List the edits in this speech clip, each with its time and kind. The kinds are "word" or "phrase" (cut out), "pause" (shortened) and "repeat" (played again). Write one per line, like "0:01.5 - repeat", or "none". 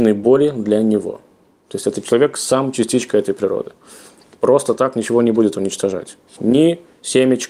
none